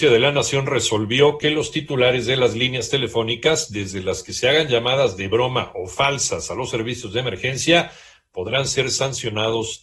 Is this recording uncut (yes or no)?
yes